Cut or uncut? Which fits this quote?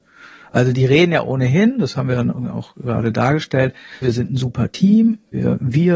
cut